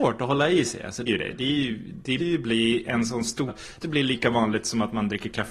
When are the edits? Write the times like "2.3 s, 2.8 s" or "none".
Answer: 1.1 s, 2.2 s, 3.5 s, 3.8 s